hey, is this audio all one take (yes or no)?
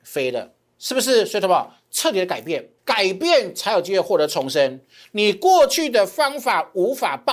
no